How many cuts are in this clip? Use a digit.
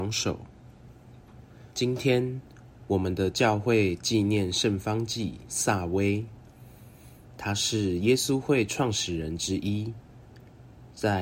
1